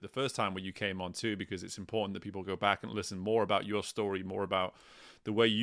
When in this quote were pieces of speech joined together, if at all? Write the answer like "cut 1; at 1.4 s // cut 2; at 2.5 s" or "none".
none